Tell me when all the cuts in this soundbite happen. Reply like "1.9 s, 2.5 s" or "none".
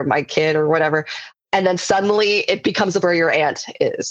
3.0 s